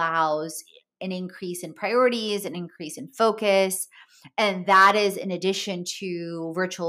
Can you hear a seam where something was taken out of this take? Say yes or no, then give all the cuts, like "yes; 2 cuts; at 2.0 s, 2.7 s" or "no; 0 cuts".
no; 0 cuts